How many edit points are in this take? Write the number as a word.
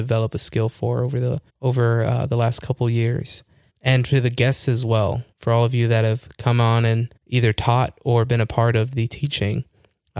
four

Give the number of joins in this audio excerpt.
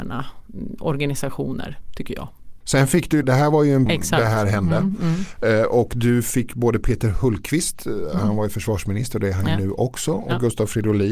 two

